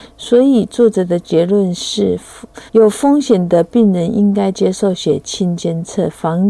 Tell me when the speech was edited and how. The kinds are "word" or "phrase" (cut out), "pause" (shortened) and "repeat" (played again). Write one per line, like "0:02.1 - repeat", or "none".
0:02.7 - pause